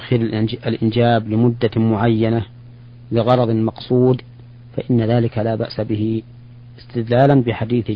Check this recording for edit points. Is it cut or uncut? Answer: uncut